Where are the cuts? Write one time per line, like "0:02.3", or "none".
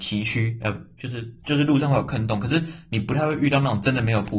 none